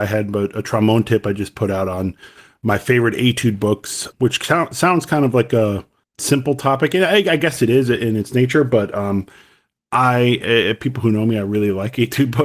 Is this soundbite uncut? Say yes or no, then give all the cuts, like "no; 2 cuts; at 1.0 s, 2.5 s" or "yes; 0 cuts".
yes; 0 cuts